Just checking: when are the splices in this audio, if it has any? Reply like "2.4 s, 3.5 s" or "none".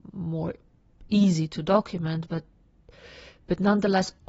none

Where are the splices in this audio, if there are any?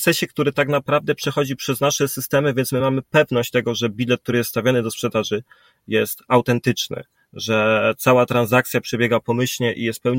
none

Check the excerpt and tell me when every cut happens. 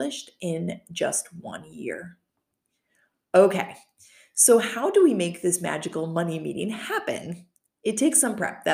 none

